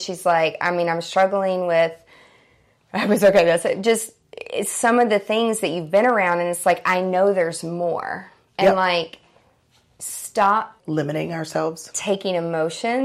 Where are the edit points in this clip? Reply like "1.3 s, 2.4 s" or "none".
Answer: 10.8 s